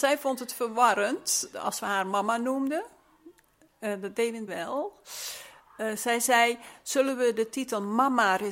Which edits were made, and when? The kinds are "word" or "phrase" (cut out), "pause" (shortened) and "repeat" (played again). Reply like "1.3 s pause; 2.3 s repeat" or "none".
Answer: 1.5 s word; 4.5 s word

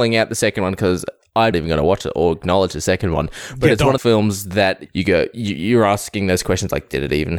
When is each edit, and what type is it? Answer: 1.5 s word; 4.0 s word; 4.9 s word

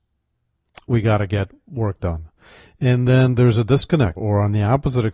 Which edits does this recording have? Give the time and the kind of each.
4.2 s word

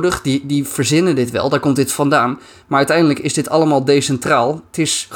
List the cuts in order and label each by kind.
none

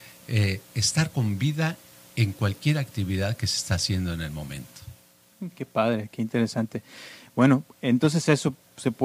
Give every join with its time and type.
none

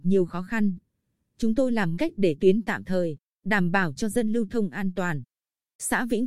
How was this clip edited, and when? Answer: 1.9 s word; 2.4 s word

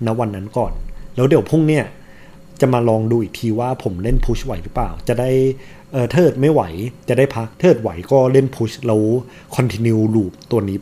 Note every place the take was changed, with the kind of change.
7.0 s pause; 7.5 s pause

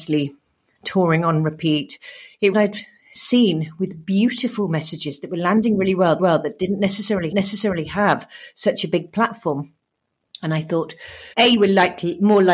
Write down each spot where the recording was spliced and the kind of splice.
2.5 s phrase; 6.2 s repeat; 7.3 s repeat; 11.3 s pause

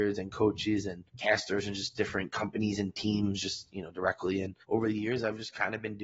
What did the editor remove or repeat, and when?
1.1 s pause; 4.6 s pause

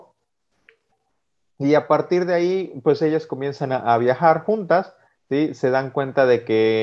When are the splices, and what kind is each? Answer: none

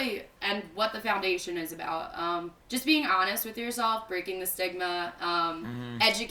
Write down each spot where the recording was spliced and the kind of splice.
2.6 s pause

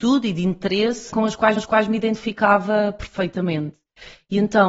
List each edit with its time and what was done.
1.1 s word; 1.6 s repeat

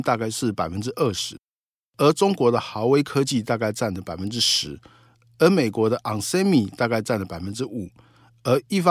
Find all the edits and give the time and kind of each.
none

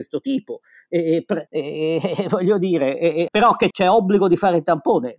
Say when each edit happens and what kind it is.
1.5 s pause; 3.3 s word; 3.7 s word

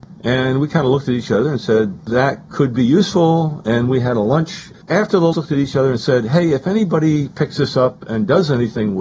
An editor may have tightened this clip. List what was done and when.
5.3 s phrase

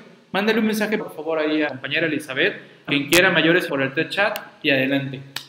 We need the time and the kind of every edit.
1.0 s word; 1.7 s word; 2.9 s word; 3.7 s phrase

